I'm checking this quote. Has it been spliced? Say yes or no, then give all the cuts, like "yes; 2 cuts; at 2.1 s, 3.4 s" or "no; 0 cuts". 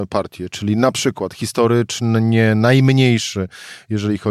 no; 0 cuts